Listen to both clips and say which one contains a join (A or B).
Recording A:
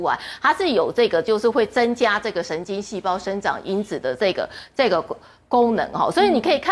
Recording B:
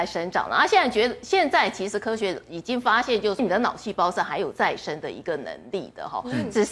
B